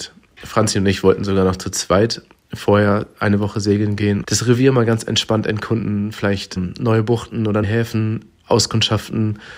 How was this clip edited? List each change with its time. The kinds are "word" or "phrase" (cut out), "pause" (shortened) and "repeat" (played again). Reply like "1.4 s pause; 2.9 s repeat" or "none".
4.2 s word; 6.6 s word; 7.6 s word

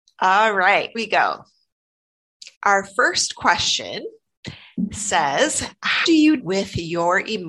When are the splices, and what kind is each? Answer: 0.9 s word; 2.5 s pause; 6.0 s word; 6.4 s word

